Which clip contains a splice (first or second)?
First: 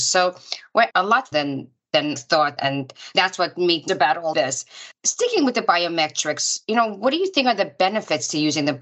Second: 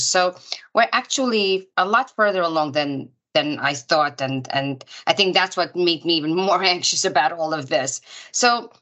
first